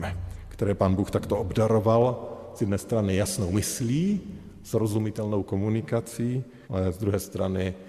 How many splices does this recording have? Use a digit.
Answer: 1